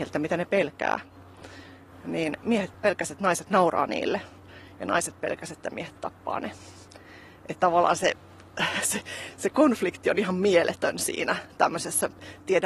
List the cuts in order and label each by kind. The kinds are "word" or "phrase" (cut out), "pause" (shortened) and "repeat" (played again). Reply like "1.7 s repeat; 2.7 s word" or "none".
none